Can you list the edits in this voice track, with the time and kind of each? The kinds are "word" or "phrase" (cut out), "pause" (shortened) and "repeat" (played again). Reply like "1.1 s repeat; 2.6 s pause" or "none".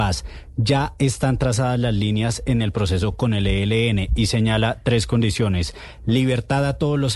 none